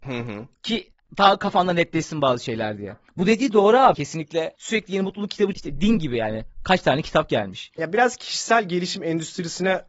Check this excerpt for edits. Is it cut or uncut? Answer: cut